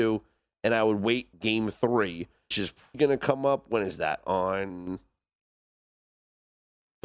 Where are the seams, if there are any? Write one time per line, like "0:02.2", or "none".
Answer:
0:01.3
0:02.5
0:02.9